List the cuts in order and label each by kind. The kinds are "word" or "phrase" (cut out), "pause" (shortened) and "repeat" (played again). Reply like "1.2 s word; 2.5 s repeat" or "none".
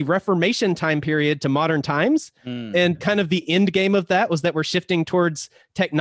2.9 s word